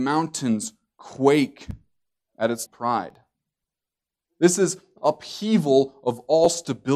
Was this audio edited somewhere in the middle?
yes; 2 cuts; at 2.7 s, 5.0 s

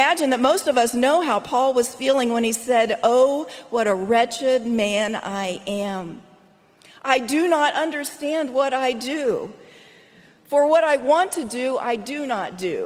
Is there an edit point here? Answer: no; 0 cuts

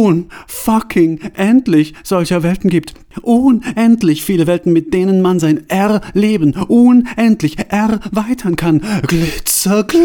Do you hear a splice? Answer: no; 0 cuts

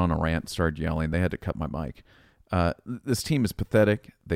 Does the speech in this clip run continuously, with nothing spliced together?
yes; 0 cuts

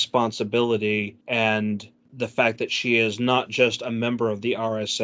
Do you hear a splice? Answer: yes; 1 cut; at 1.2 s

